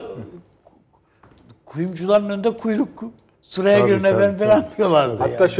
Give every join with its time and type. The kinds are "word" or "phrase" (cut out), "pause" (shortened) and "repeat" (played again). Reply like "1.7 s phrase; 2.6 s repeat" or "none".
none